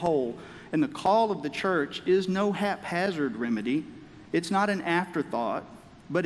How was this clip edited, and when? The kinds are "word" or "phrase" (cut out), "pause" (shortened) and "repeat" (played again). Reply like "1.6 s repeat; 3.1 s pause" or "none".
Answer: 4.3 s pause